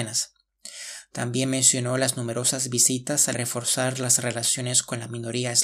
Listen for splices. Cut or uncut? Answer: cut